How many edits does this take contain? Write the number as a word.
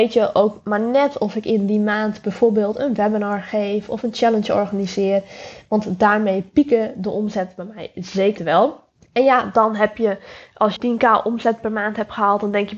three